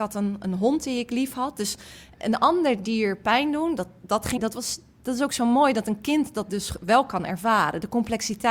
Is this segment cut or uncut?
cut